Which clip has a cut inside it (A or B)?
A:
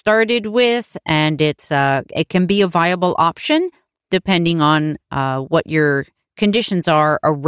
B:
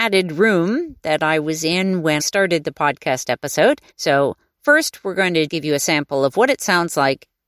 B